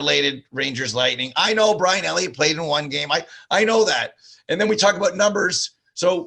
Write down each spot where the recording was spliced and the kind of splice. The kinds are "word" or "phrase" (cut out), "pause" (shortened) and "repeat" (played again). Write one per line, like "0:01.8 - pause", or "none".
none